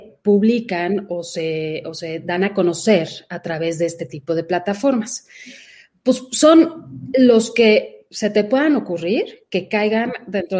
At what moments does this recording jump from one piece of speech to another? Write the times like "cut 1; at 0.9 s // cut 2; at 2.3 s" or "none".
none